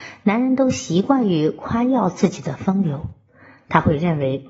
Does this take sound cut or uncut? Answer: uncut